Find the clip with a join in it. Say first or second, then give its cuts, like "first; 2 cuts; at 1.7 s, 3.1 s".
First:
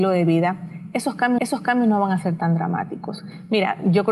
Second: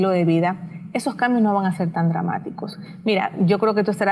first; 1 cut; at 1.4 s